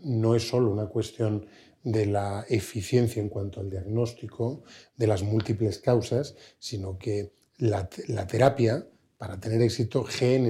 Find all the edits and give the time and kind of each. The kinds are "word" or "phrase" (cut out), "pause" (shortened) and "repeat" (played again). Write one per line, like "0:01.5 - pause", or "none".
none